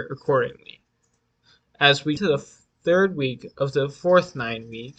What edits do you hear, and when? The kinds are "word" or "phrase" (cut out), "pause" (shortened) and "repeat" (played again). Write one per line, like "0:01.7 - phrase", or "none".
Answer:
0:02.2 - word